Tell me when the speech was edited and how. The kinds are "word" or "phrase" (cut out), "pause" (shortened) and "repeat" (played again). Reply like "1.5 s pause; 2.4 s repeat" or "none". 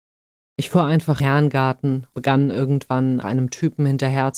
1.2 s word; 2.1 s word; 3.2 s word